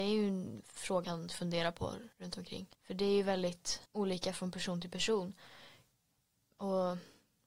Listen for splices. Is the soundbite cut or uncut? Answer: cut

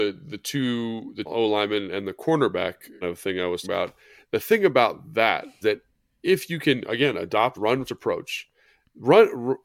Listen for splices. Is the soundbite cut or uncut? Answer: cut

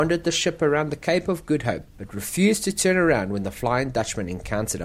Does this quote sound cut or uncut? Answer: cut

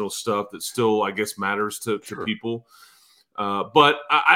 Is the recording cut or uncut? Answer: uncut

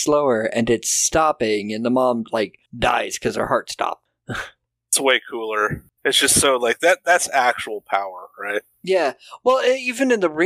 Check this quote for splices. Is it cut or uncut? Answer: cut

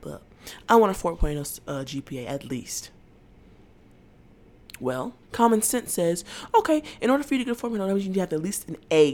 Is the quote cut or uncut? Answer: cut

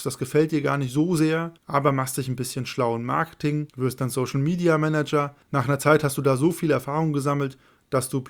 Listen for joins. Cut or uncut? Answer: cut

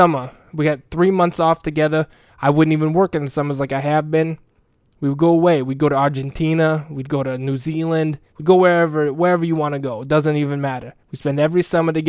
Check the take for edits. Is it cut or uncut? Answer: cut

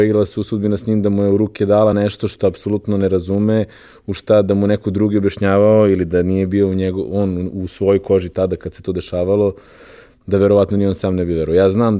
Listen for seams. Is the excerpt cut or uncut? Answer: uncut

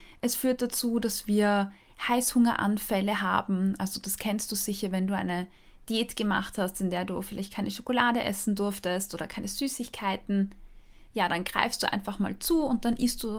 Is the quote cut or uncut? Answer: uncut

